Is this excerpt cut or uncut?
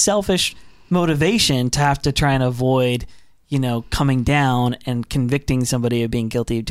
uncut